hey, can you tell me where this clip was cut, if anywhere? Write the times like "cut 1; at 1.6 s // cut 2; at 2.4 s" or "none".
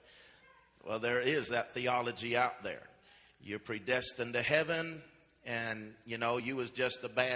none

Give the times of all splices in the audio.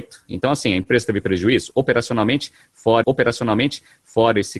cut 1; at 3.0 s

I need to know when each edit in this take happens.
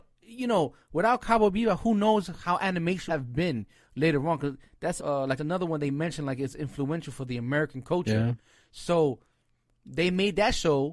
cut 1; at 3.1 s // cut 2; at 5.0 s // cut 3; at 5.4 s

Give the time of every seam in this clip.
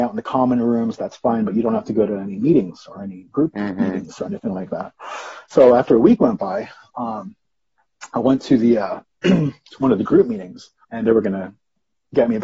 cut 1; at 10.8 s

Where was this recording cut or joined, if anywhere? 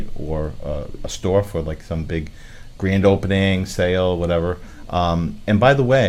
none

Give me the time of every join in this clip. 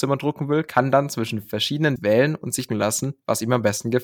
cut 1; at 2.0 s // cut 2; at 2.7 s

